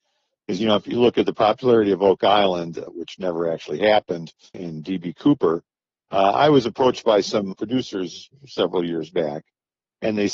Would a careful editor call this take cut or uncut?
cut